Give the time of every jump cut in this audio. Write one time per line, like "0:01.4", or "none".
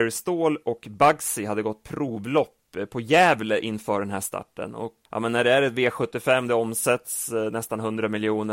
0:05.0